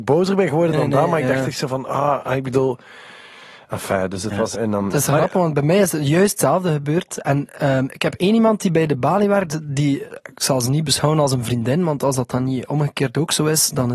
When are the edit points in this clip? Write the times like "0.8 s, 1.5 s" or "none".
4.5 s, 10.3 s

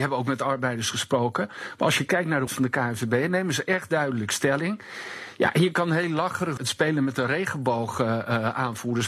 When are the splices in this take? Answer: 2.5 s, 6.6 s

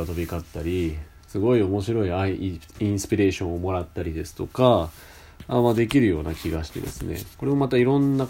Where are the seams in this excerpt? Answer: 7.3 s

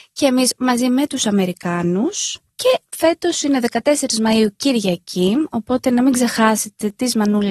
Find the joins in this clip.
none

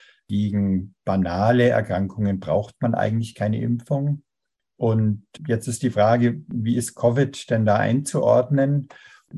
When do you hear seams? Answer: none

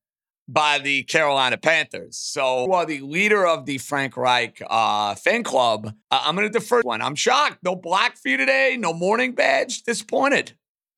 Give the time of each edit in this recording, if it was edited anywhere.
2.7 s, 6.0 s, 6.8 s

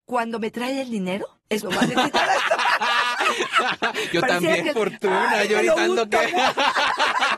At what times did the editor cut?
1.6 s, 4.7 s

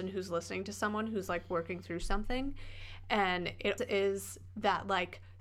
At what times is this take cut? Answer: 3.8 s

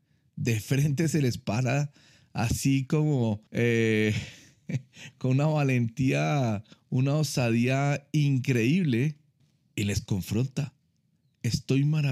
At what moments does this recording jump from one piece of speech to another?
3.5 s, 9.4 s

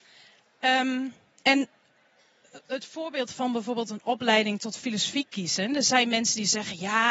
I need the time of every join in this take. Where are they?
none

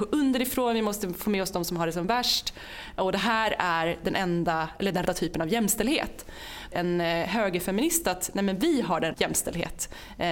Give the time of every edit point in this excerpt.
5.1 s, 6.7 s, 9.1 s

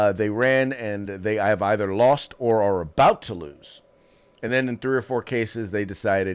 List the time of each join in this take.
none

